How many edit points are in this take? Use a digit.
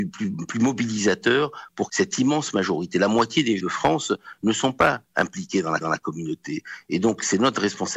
3